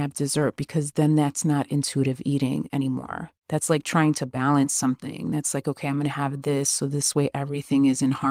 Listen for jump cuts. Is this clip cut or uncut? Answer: cut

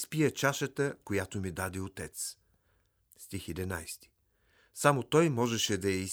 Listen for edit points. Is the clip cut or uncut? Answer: uncut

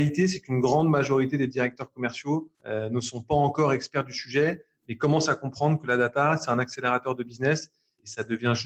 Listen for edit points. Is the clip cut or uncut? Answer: cut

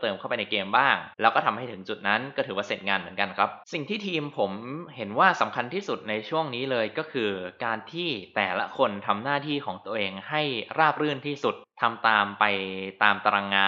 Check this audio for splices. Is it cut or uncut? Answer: cut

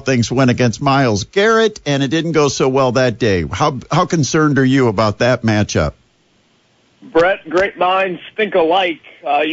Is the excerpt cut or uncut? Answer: uncut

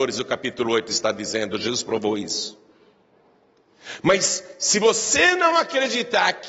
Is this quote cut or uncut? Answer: uncut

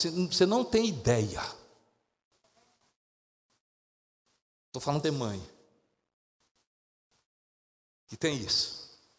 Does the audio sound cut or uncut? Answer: cut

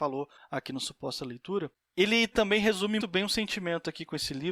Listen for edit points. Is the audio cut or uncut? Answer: cut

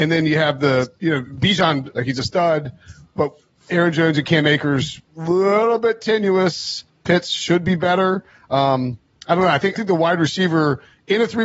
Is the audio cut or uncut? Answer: cut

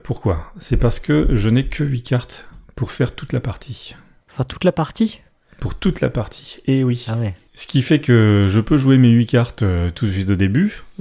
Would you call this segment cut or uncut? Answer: uncut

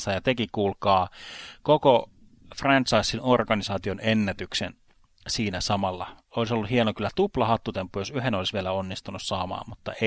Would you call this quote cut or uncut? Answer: uncut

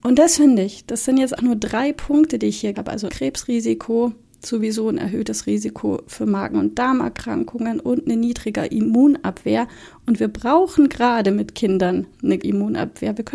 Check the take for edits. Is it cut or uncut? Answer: cut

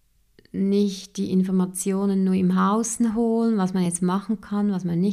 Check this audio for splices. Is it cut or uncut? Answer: uncut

